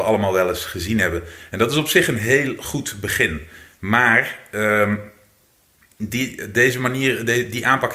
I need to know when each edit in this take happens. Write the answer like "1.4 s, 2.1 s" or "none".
none